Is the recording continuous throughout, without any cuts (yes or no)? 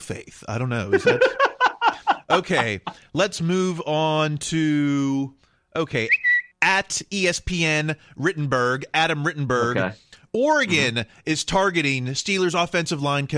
yes